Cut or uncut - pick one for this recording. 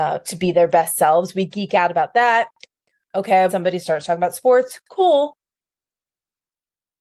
cut